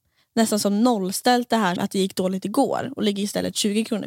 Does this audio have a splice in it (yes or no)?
yes